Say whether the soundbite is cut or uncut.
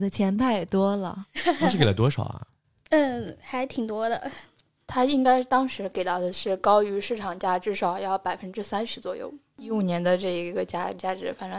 uncut